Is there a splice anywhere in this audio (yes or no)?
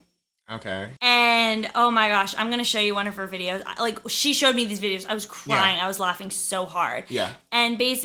yes